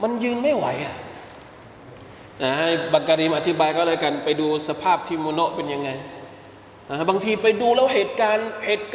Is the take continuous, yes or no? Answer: yes